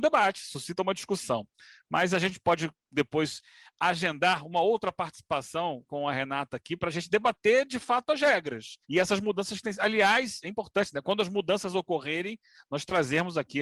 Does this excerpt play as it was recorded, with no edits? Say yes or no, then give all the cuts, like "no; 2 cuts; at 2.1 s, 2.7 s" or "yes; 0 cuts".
no; 1 cut; at 8.8 s